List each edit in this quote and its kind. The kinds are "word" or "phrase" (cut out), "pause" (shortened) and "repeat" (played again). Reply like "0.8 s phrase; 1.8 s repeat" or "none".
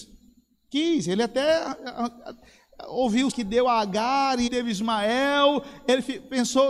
3.3 s word; 4.5 s word